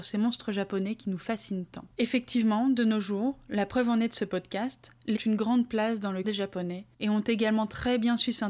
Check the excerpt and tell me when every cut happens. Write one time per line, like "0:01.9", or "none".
0:01.9
0:05.1
0:06.2
0:06.9

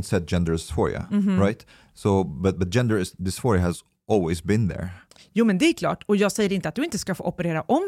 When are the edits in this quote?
none

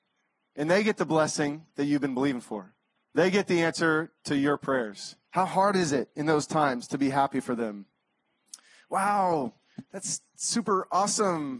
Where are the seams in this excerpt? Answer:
0:03.0
0:05.2

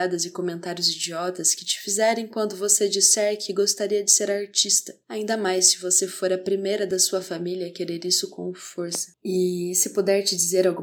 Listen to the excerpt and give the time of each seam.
none

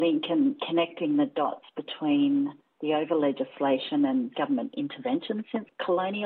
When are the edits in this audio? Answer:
none

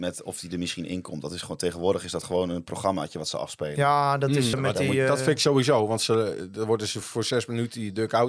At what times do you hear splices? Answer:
0:04.5
0:07.0

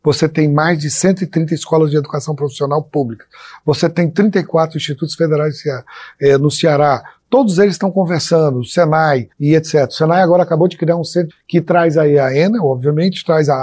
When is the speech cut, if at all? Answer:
0:09.3
0:11.3

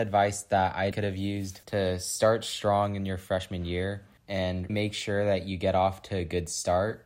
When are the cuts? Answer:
0:00.9
0:01.6
0:04.7

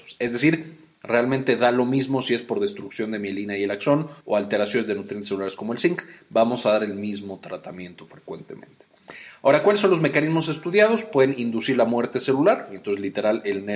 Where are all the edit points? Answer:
0:04.2

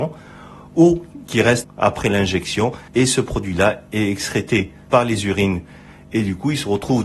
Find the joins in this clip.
0:01.6
0:02.9
0:04.9

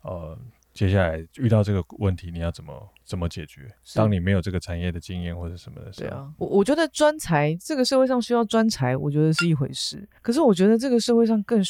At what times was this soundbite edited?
0:01.3
0:03.0
0:06.4
0:10.2

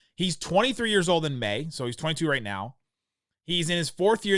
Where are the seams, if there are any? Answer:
none

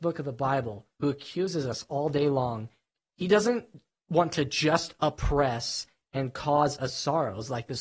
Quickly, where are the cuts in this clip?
none

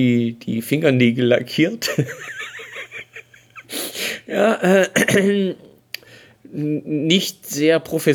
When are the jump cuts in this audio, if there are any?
none

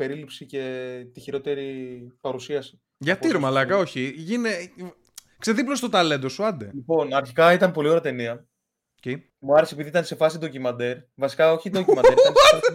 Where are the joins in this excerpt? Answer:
0:09.3

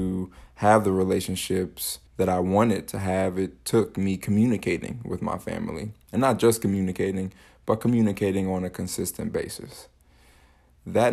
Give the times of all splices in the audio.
0:02.1

